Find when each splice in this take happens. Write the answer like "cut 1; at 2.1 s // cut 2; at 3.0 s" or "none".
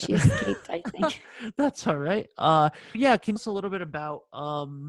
cut 1; at 2.9 s // cut 2; at 3.4 s